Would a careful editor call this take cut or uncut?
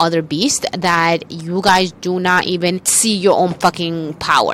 uncut